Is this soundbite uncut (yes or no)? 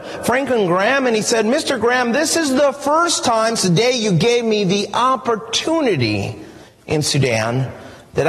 no